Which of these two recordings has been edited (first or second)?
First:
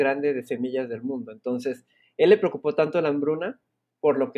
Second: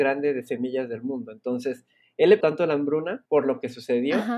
second